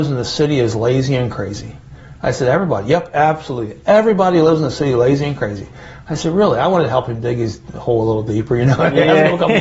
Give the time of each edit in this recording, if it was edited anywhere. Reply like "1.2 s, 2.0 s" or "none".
none